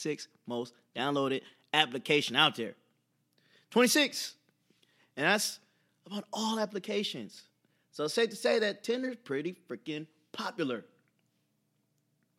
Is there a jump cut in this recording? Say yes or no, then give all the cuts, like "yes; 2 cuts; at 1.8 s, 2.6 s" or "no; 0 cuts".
no; 0 cuts